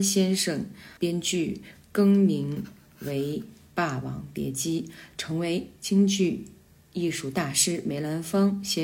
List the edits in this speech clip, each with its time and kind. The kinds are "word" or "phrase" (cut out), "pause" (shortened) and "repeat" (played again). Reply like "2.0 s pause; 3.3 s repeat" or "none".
1.0 s pause